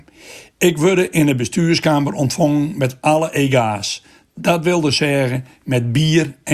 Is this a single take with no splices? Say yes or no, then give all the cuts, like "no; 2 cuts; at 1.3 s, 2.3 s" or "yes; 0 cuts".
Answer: yes; 0 cuts